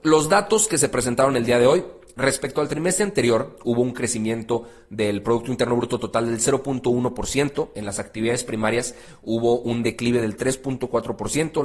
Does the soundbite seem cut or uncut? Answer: uncut